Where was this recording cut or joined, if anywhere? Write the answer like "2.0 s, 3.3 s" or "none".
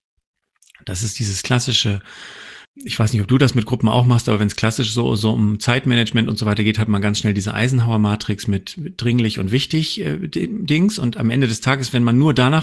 2.6 s